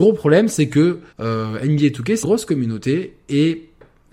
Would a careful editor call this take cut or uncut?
cut